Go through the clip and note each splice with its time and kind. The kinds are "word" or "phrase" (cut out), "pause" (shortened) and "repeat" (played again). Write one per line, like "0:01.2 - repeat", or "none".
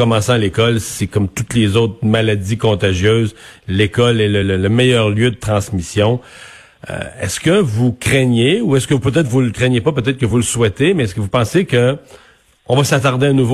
none